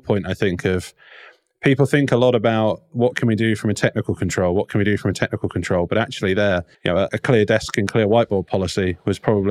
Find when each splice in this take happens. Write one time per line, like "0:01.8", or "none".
0:06.7
0:07.1